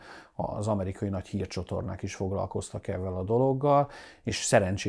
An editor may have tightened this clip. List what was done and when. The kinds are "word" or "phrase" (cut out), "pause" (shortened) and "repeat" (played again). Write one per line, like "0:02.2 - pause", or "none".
none